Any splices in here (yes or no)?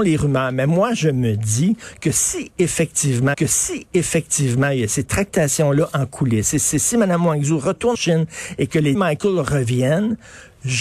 yes